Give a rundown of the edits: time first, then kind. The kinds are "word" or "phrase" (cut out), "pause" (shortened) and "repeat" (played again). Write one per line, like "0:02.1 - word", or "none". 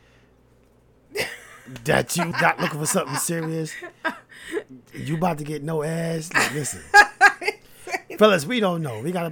0:02.3 - word

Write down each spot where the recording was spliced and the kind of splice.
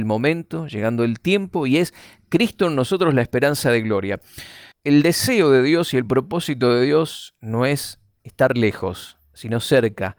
0:04.7 - pause

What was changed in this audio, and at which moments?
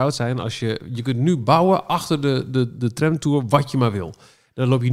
none

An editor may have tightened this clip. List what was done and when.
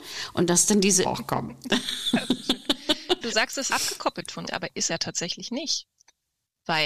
0:01.0 - word
0:03.2 - word
0:03.7 - word
0:04.5 - word
0:04.9 - word

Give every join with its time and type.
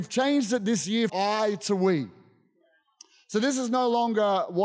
0:01.1 - word

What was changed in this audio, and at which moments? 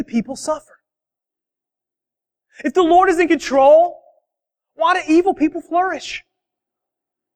none

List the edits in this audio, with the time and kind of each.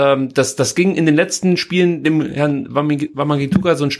none

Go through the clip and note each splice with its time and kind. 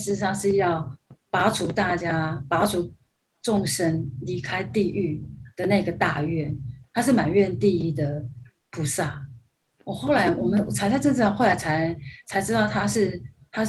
0:08.6 - pause

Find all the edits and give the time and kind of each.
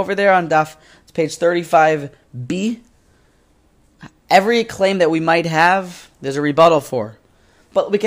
0:06.1 - pause

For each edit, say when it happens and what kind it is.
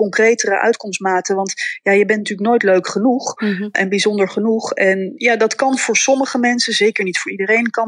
none

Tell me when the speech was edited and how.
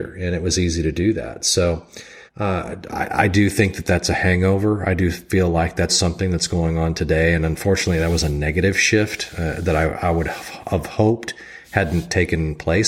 0:02.3 - pause
0:05.9 - word

